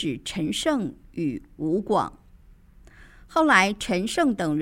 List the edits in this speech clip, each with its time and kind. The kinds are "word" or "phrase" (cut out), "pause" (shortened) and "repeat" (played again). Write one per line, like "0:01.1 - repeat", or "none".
none